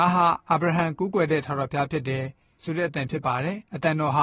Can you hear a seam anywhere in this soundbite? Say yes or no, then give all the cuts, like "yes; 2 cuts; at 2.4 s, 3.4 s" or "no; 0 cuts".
no; 0 cuts